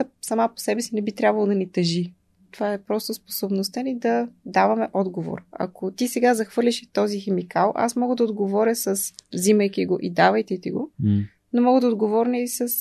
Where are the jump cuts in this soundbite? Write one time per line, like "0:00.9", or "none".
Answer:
none